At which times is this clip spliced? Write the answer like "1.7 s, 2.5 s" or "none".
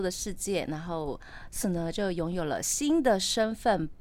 1.6 s